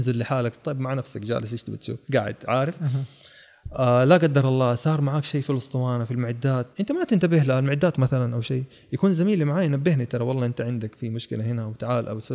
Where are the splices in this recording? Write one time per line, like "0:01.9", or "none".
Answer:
0:02.0
0:06.7
0:07.9